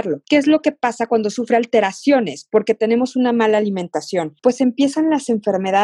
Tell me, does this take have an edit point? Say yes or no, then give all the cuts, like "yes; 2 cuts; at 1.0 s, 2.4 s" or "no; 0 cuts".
no; 0 cuts